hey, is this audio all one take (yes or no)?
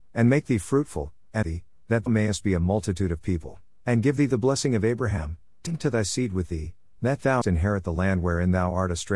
no